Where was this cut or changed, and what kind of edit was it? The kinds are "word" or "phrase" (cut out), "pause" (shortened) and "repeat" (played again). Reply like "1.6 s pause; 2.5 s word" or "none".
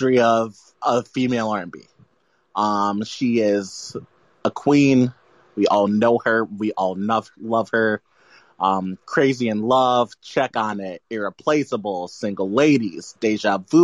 none